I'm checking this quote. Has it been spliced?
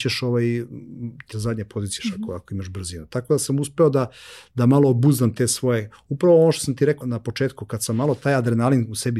yes; 3 cuts; at 1.3 s, 2.0 s, 7.0 s

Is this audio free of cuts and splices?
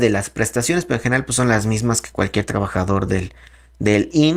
yes; 0 cuts

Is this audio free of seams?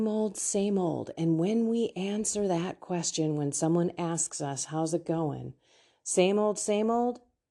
yes; 0 cuts

